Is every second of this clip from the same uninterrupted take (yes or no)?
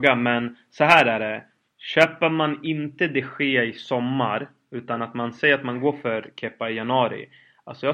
yes